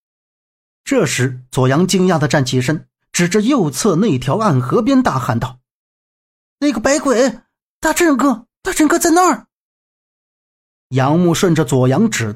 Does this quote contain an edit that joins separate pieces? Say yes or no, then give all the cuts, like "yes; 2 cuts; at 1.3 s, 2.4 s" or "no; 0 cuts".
no; 0 cuts